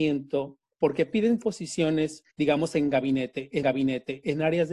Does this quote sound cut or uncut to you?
cut